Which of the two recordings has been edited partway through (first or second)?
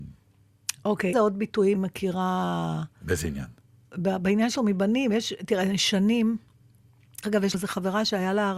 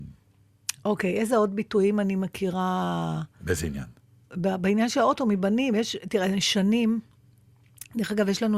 first